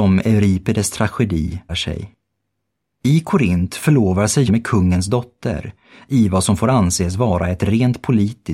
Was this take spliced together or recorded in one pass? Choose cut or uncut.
cut